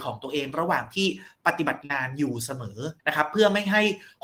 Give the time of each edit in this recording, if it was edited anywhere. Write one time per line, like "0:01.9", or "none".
0:03.0